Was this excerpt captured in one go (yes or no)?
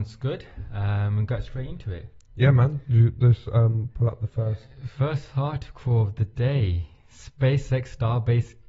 yes